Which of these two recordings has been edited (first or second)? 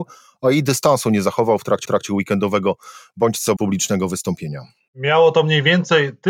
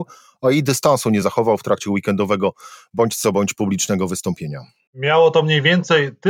first